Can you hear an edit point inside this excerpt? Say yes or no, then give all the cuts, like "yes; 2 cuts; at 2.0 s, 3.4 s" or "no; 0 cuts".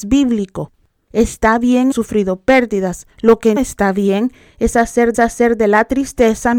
yes; 4 cuts; at 1.9 s, 3.1 s, 3.6 s, 5.1 s